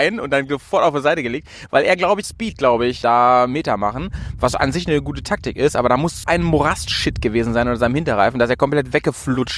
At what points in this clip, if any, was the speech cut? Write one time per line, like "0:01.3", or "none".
0:02.2
0:03.0
0:06.2